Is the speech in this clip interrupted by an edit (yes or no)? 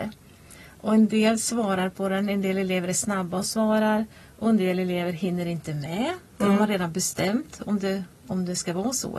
no